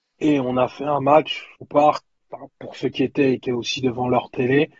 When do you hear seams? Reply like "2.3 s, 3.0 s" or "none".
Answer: 1.6 s, 2.5 s, 3.4 s